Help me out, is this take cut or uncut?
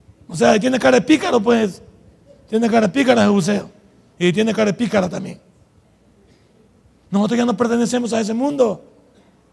uncut